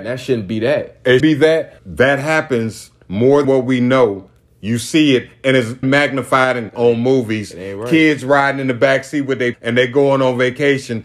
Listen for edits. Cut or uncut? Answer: cut